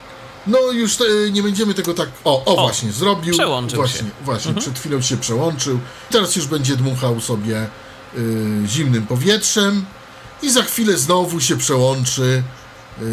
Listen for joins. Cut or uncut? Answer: cut